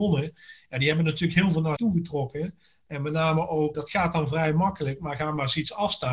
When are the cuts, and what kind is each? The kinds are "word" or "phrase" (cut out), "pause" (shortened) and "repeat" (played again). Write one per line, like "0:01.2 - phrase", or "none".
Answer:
0:01.8 - word
0:03.7 - word